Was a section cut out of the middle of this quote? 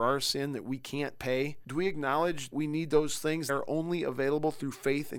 yes; 2 cuts; at 2.5 s, 3.5 s

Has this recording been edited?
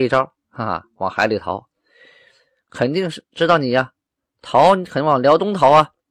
no; 0 cuts

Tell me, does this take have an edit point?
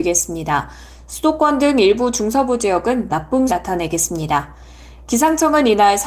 yes; 2 cuts; at 3.1 s, 3.5 s

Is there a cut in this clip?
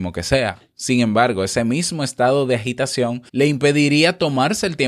yes; 1 cut; at 3.3 s

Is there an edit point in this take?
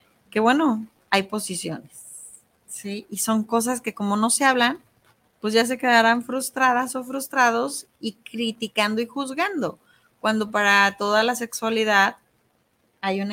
no; 0 cuts

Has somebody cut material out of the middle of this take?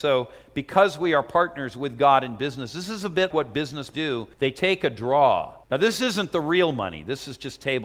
yes; 4 cuts; at 3.3 s, 3.9 s, 4.3 s, 5.6 s

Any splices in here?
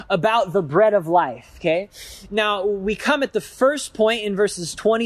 no; 0 cuts

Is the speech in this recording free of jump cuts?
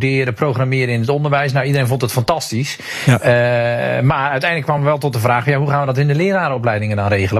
yes; 0 cuts

